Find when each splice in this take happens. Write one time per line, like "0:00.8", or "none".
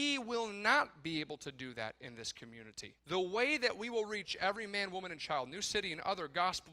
0:03.0